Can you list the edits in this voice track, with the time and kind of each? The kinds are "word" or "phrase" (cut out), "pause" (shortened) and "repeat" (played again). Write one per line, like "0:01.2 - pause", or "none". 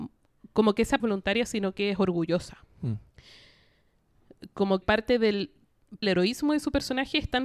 0:01.0 - phrase
0:04.8 - word
0:06.0 - phrase